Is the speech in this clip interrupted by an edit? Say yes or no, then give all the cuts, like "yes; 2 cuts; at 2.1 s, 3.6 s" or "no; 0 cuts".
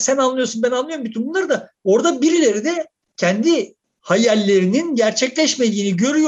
no; 0 cuts